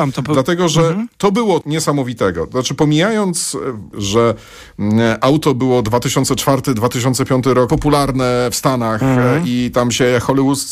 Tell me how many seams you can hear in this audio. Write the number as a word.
three